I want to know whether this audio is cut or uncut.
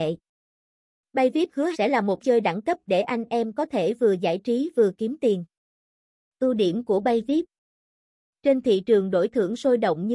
cut